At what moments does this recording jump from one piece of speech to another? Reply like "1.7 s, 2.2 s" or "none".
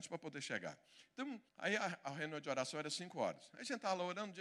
1.5 s